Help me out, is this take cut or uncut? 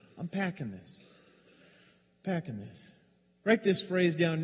uncut